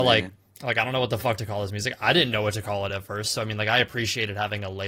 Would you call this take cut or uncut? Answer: uncut